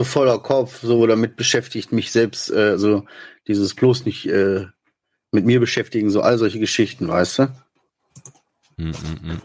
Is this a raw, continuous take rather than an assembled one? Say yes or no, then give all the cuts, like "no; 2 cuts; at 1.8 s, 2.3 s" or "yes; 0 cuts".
yes; 0 cuts